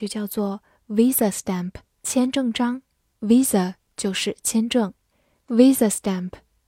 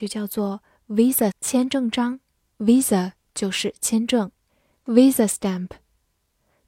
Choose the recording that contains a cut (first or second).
second